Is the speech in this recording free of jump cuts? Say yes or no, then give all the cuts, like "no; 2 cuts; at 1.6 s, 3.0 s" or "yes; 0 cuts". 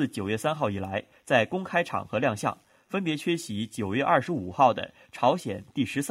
yes; 0 cuts